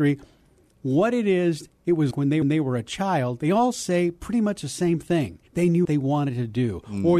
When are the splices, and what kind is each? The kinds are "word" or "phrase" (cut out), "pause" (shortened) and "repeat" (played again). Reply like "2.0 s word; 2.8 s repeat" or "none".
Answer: 2.1 s word; 2.4 s repeat; 5.5 s pause; 5.8 s phrase